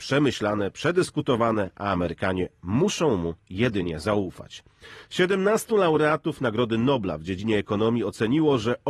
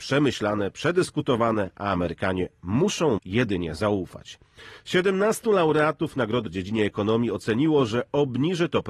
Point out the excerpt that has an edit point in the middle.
second; 2 cuts; at 3.2 s, 6.5 s

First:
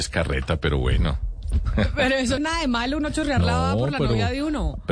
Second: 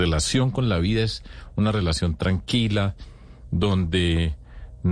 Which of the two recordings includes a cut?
first; 1 cut; at 2.4 s

